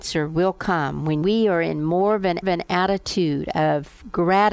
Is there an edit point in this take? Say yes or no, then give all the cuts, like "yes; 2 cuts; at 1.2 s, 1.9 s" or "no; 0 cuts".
yes; 2 cuts; at 1.2 s, 2.4 s